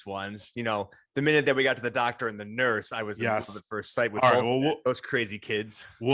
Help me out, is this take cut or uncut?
uncut